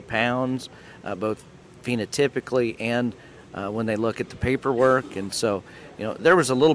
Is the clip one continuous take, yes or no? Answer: yes